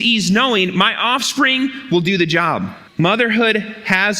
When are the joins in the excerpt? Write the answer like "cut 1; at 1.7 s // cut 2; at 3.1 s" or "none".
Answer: cut 1; at 2.9 s